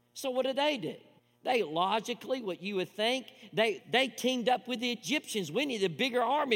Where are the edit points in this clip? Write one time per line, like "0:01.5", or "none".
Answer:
0:01.2
0:03.8